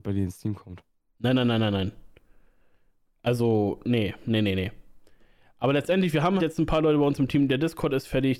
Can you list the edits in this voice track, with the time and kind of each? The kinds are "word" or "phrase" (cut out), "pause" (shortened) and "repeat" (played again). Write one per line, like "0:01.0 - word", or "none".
0:06.4 - word

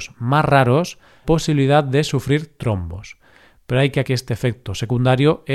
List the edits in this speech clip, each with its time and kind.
0:01.2 - word
0:04.0 - word

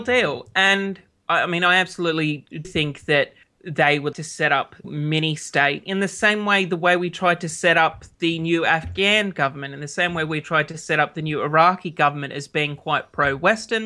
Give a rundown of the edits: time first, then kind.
0:02.6 - word
0:03.4 - pause
0:04.1 - word
0:04.8 - phrase

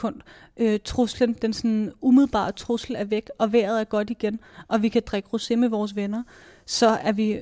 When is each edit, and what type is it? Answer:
none

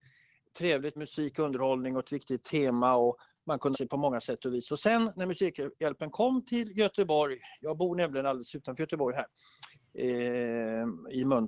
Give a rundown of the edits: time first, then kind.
0:01.0 - word
0:03.7 - word
0:05.1 - word

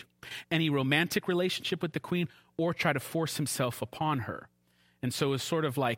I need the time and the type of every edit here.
none

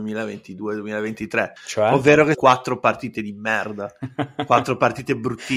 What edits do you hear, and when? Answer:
0:01.6 - pause
0:02.3 - phrase
0:03.1 - word

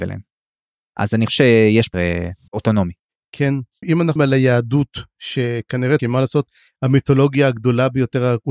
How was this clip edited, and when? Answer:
0:01.3 - word
0:01.9 - word
0:02.5 - word
0:03.8 - phrase
0:04.2 - word
0:06.0 - phrase

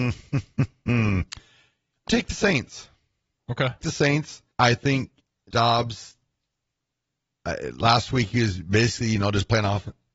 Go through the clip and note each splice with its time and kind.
0:02.1 - word
0:03.8 - phrase
0:04.5 - pause
0:05.5 - word

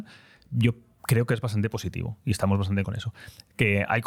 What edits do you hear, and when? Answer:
0:02.8 - word

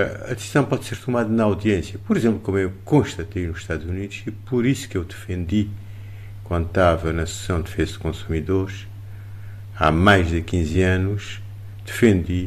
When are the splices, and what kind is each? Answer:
none

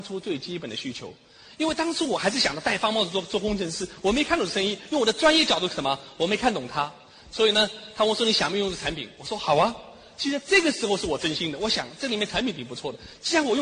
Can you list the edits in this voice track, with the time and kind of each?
none

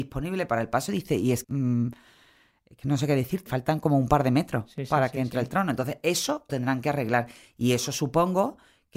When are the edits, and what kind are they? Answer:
0:01.4 - word
0:03.5 - word
0:06.5 - word

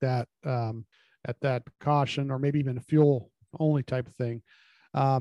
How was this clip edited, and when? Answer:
0:00.9 - pause

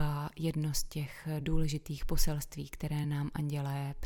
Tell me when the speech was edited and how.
none

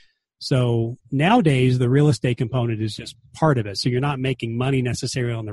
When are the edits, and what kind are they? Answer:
none

